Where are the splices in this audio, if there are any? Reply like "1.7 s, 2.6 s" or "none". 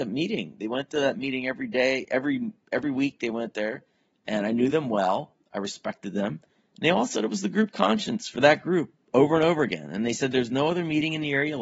none